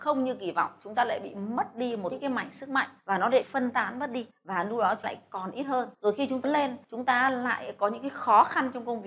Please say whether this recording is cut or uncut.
cut